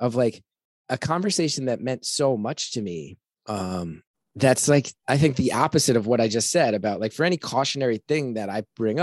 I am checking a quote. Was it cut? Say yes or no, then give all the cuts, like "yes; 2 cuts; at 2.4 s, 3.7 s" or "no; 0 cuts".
yes; 2 cuts; at 4.1 s, 5.0 s